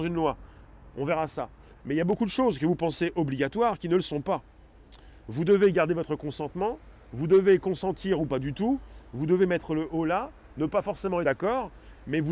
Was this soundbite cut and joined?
yes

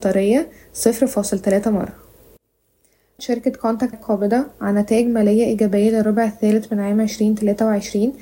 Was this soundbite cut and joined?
yes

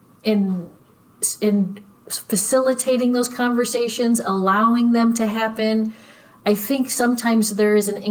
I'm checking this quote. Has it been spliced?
no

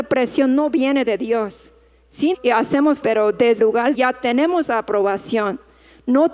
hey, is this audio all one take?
no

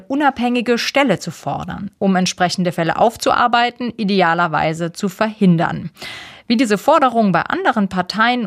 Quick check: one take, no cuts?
yes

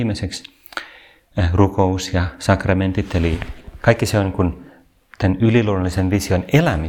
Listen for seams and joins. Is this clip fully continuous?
yes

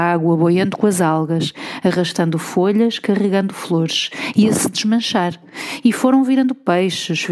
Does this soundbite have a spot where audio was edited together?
no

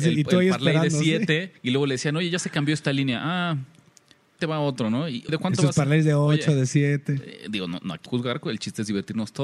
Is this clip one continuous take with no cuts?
no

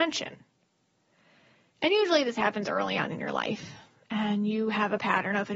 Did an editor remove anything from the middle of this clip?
no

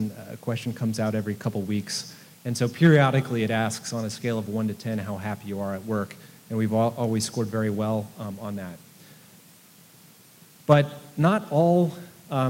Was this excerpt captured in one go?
yes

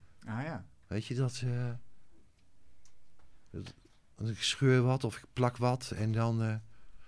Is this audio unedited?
yes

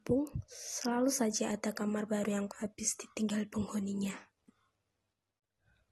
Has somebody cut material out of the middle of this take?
yes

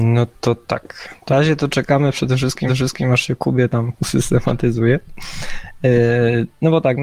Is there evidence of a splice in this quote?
yes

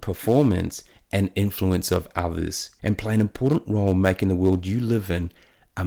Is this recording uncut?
no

